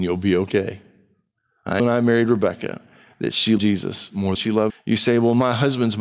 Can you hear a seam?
yes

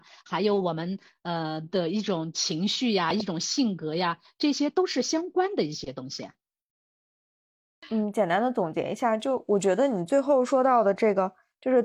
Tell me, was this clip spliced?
no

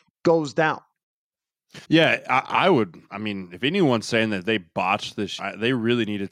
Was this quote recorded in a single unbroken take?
no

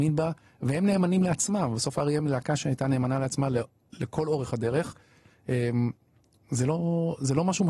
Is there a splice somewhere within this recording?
no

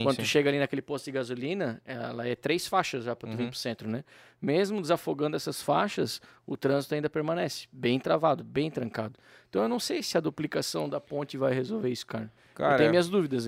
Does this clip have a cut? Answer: no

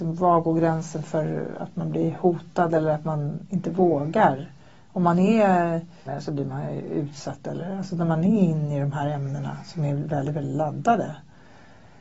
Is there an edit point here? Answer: yes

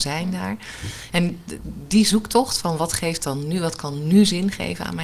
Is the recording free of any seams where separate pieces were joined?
yes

